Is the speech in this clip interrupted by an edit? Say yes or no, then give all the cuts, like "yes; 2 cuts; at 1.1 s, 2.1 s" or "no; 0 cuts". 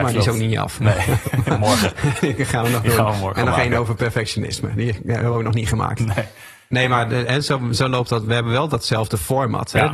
no; 0 cuts